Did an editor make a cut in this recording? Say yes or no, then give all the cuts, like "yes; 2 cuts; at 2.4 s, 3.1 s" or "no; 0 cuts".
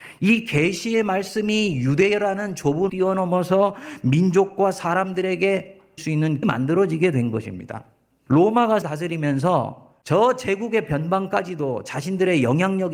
yes; 4 cuts; at 2.9 s, 6.0 s, 6.4 s, 8.8 s